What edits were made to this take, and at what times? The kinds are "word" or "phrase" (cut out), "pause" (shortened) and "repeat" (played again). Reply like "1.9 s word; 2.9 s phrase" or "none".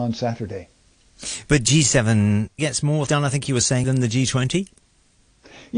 2.6 s word; 3.1 s word; 3.8 s word